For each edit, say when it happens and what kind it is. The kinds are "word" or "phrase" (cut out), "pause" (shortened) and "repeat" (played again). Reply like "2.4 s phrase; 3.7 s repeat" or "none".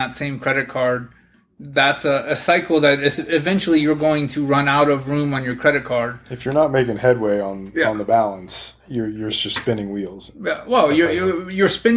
8.8 s pause